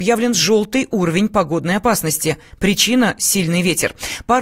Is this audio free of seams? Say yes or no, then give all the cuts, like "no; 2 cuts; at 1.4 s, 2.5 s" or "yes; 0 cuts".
yes; 0 cuts